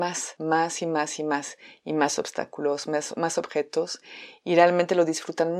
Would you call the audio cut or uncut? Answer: uncut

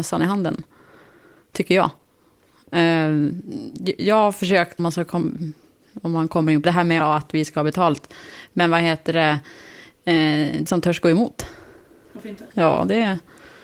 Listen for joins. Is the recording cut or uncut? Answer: cut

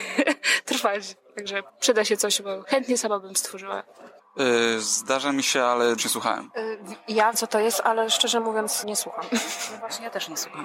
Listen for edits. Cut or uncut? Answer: cut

